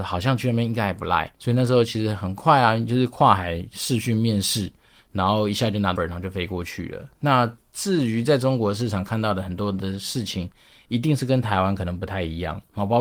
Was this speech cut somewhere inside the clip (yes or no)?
yes